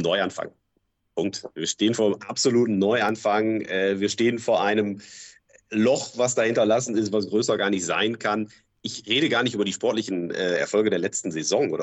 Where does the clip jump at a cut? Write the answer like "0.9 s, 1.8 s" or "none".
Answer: none